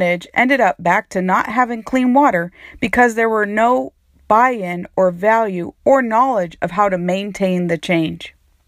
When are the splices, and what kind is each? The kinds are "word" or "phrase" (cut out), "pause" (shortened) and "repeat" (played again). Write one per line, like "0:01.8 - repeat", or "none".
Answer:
none